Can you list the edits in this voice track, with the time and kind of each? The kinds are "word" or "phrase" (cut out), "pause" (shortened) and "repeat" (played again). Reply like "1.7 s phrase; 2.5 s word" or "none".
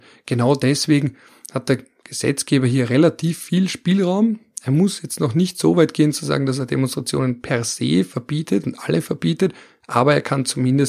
none